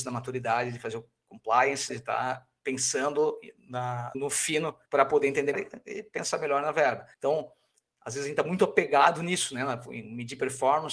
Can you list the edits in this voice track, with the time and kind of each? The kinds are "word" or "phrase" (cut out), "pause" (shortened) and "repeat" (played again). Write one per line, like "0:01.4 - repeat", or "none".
0:01.9 - word
0:04.1 - word
0:04.9 - pause
0:05.5 - word
0:07.1 - pause